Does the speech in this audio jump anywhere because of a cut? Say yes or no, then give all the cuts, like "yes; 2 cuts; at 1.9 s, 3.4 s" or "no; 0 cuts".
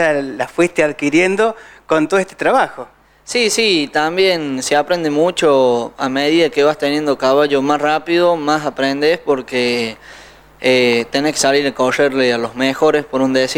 no; 0 cuts